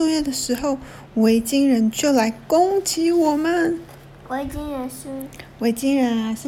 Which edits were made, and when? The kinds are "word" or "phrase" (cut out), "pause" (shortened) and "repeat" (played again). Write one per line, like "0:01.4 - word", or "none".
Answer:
none